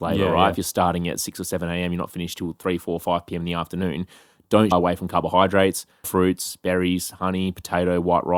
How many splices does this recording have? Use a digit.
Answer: 2